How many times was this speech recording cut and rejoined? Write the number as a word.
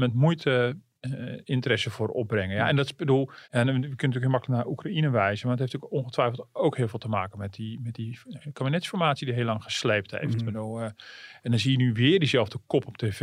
one